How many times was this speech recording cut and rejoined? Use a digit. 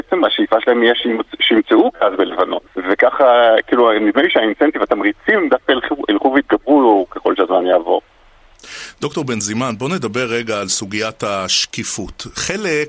1